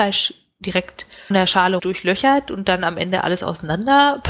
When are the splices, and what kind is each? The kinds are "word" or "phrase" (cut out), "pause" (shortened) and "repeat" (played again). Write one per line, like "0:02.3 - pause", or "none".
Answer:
0:01.3 - word
0:01.8 - phrase